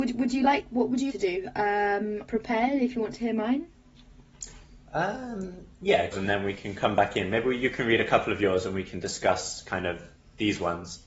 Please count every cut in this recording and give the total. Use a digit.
4